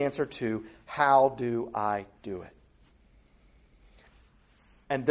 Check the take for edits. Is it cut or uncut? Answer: uncut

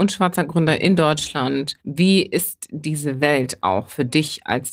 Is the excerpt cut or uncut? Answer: cut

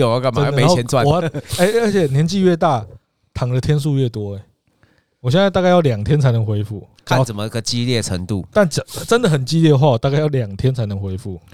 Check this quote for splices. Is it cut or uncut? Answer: uncut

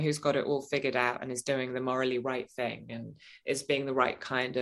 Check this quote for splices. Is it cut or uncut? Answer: uncut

